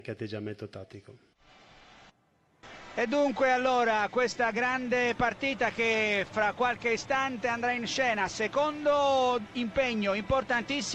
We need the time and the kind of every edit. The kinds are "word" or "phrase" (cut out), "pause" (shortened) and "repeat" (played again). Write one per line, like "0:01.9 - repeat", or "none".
none